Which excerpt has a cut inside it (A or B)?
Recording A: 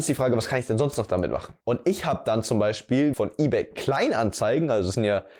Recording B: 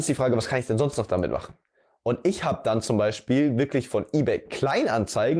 A